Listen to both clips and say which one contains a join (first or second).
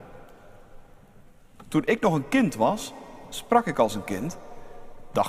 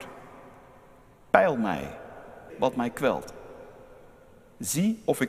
second